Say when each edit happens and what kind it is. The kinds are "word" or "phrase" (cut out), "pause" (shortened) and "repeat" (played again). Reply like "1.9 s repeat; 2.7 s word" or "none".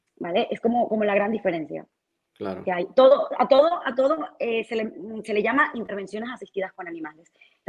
none